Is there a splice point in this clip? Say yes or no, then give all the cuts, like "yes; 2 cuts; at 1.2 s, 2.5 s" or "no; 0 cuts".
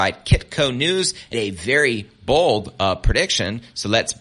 yes; 1 cut; at 1.3 s